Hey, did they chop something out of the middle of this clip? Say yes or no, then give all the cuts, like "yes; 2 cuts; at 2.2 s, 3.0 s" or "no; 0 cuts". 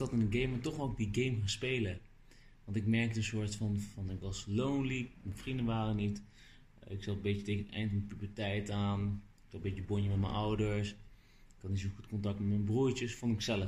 no; 0 cuts